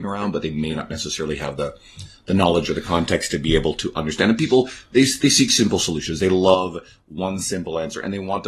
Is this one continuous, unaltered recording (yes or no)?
yes